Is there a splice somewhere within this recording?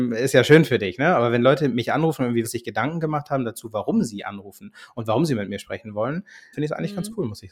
yes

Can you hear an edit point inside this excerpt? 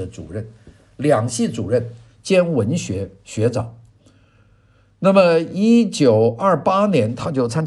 no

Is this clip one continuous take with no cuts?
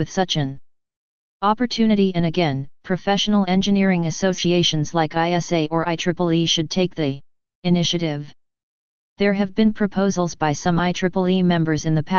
no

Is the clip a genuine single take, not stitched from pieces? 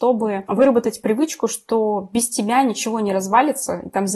yes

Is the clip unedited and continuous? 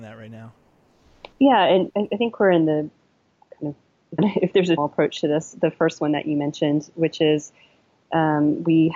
no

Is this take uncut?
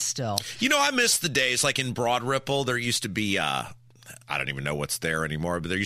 yes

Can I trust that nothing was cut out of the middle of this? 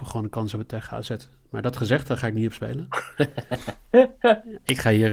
yes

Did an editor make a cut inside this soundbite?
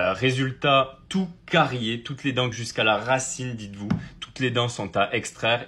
yes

